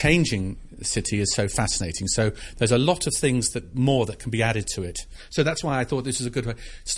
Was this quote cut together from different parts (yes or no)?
no